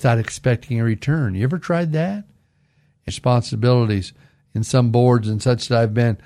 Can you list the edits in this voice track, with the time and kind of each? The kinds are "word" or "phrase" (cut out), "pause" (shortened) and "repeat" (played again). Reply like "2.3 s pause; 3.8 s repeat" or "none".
3.1 s phrase